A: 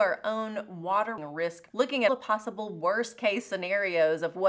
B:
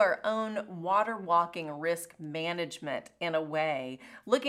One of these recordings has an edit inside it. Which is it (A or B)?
A